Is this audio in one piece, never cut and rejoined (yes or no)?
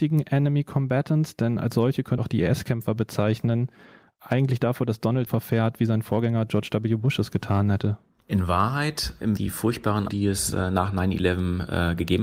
no